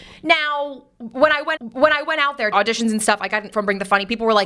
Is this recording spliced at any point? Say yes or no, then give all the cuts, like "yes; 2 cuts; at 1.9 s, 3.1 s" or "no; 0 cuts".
yes; 3 cuts; at 1.6 s, 2.5 s, 3.5 s